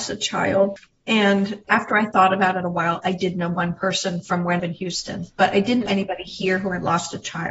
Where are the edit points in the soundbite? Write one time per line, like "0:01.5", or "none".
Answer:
0:01.7
0:04.6
0:05.9